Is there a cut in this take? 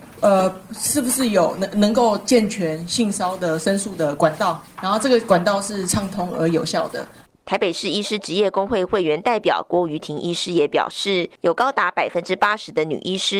no; 0 cuts

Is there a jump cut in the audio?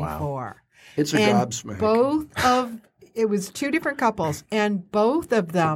no; 0 cuts

